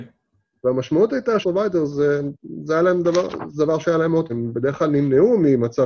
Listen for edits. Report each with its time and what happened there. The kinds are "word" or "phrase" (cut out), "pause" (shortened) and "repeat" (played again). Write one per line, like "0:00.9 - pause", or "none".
0:01.4 - word
0:04.3 - word